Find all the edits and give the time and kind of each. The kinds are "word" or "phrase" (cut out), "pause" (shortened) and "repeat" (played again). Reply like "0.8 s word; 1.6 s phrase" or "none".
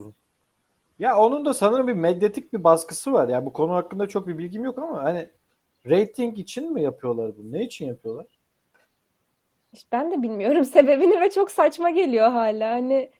none